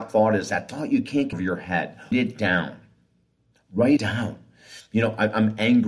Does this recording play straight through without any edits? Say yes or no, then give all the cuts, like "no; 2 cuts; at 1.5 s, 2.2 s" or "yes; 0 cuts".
no; 3 cuts; at 1.3 s, 2.1 s, 4.0 s